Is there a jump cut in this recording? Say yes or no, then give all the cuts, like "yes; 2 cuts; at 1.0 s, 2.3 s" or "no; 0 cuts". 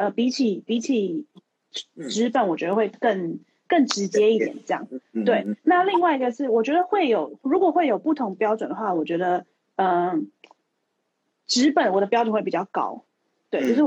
no; 0 cuts